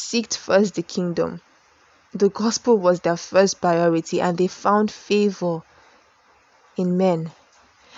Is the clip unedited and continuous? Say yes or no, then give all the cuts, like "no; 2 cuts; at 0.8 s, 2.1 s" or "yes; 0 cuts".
yes; 0 cuts